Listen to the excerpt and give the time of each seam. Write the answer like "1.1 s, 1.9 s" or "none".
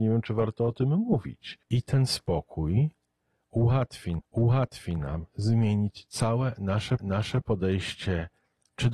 1.6 s, 4.2 s, 7.0 s

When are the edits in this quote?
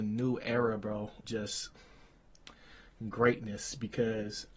1.2 s

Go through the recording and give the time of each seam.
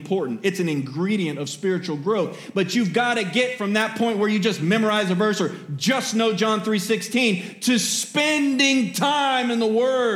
none

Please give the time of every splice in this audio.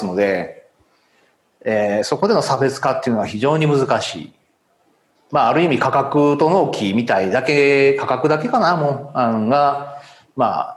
none

